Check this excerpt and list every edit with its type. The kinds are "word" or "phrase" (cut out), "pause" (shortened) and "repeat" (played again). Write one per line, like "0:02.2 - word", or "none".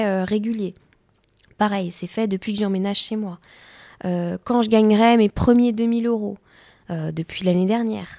none